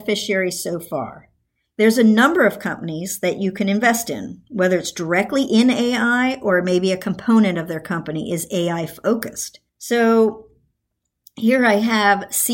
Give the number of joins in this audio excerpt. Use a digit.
1